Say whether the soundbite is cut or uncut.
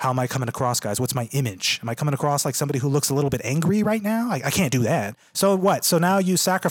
uncut